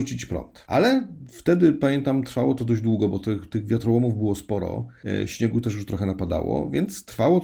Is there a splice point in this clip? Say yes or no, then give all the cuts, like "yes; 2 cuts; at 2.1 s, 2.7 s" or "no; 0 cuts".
no; 0 cuts